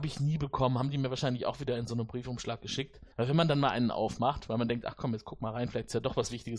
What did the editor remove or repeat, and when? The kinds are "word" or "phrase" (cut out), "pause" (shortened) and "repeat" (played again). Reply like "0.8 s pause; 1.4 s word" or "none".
3.1 s pause